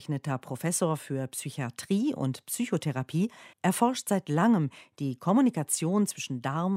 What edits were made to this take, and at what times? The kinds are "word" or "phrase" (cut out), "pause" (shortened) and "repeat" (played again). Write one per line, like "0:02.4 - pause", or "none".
0:03.5 - pause